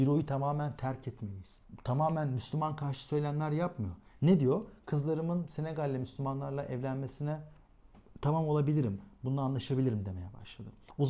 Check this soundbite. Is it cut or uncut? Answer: uncut